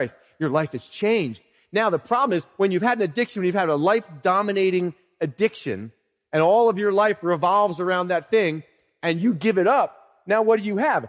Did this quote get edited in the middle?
no; 0 cuts

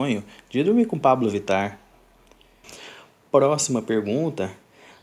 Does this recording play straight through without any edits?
yes; 0 cuts

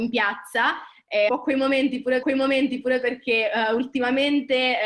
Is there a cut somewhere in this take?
yes; 2 cuts; at 1.3 s, 2.2 s

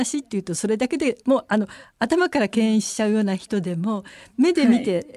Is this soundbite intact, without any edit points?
yes; 0 cuts

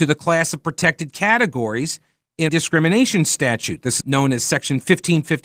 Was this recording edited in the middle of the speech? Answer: yes; 2 cuts; at 2.5 s, 4.0 s

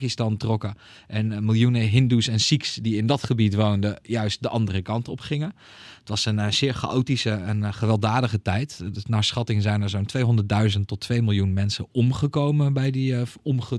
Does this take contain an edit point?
no; 0 cuts

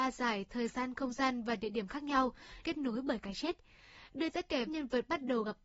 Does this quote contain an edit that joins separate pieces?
yes; 3 cuts; at 2.6 s, 4.3 s, 4.7 s

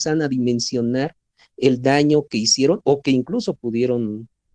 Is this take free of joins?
yes; 0 cuts

